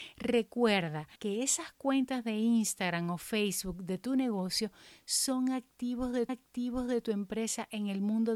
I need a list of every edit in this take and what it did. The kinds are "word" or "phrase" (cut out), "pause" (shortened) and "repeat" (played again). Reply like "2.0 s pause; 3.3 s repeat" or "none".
1.2 s pause; 6.3 s repeat